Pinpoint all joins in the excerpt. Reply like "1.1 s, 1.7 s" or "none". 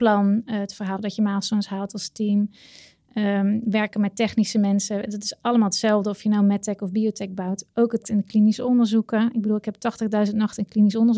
1.0 s, 8.0 s